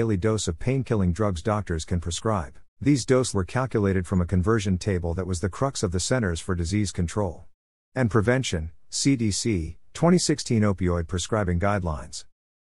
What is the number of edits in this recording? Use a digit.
2